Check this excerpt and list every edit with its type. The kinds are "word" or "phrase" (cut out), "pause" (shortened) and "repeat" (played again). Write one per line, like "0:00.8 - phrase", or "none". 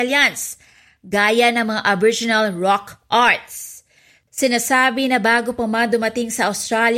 none